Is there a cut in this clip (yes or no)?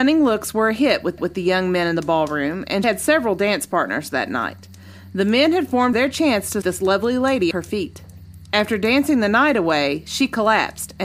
yes